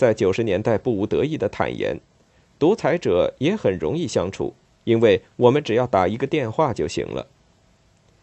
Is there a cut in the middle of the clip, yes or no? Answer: no